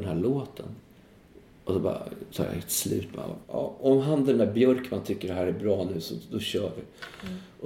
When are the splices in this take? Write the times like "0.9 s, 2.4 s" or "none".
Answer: 3.4 s